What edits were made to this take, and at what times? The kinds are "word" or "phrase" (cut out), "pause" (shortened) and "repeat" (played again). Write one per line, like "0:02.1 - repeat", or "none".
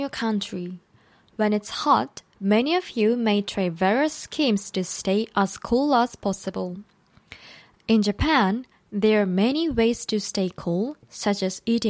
0:02.3 - pause